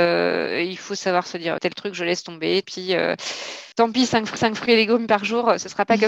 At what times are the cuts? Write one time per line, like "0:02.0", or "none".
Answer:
0:01.6
0:02.6
0:03.7
0:04.4

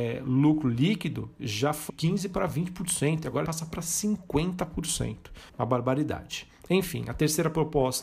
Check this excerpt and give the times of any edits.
0:01.9
0:03.5
0:05.5

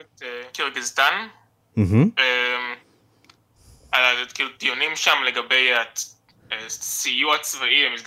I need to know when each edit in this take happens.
none

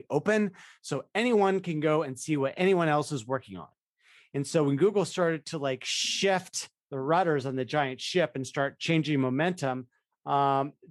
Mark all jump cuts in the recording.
none

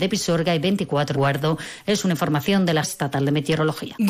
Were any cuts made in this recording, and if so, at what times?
0:01.1
0:02.8

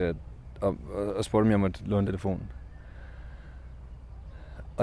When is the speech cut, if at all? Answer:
0:02.1

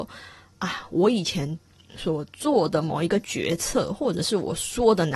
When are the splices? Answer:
0:01.6

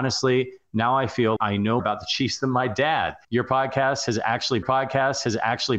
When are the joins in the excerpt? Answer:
0:01.4
0:01.8
0:03.2
0:04.6

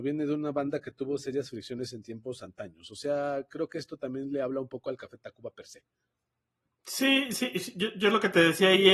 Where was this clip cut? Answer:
none

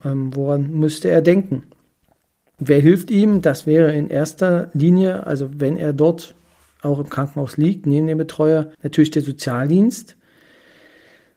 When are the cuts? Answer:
0:08.7

